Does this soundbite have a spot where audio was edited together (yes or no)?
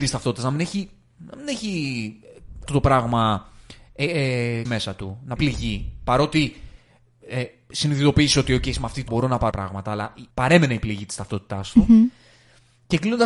yes